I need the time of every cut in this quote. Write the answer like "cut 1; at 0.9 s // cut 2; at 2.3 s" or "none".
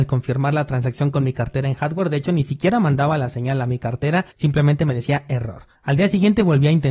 cut 1; at 4.3 s // cut 2; at 5.8 s